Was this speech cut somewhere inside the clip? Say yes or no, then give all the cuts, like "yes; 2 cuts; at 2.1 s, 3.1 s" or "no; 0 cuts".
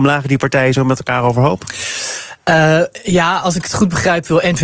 no; 0 cuts